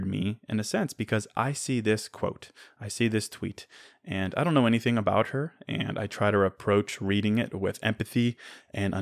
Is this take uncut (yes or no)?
yes